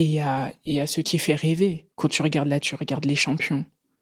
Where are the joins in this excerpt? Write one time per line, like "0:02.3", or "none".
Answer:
0:01.0
0:01.9
0:02.6